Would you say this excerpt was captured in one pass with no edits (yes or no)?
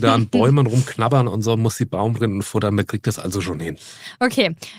yes